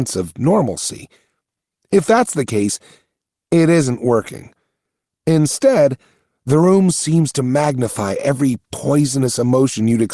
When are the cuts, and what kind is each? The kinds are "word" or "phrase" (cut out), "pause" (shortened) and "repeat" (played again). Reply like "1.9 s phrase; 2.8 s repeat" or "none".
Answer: none